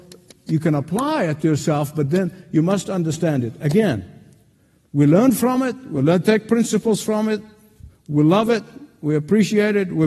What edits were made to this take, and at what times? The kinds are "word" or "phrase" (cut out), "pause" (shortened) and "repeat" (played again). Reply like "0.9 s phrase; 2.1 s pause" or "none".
none